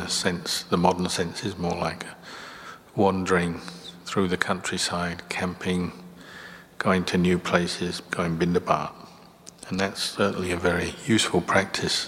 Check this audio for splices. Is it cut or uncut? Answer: uncut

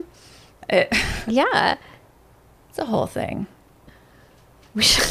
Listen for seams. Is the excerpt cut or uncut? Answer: uncut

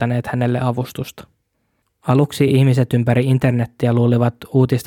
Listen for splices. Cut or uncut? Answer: uncut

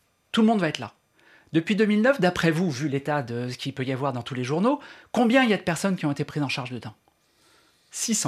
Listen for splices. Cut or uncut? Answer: uncut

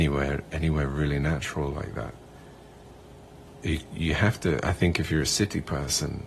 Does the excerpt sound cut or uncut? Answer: uncut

